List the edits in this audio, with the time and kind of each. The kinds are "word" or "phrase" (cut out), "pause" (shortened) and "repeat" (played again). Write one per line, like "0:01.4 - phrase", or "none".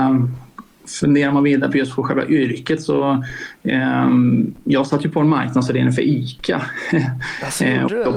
none